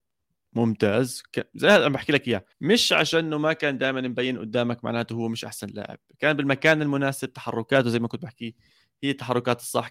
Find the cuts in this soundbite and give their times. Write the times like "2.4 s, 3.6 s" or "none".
2.5 s